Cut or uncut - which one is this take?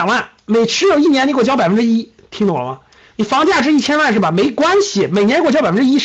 uncut